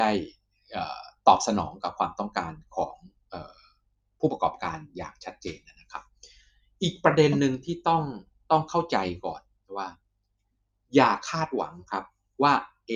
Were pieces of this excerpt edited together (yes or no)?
no